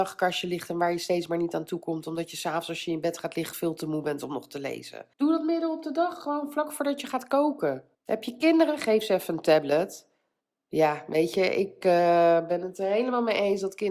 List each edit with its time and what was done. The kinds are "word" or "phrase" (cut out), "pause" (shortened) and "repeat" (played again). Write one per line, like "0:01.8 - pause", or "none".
0:05.1 - pause
0:07.9 - pause
0:10.4 - pause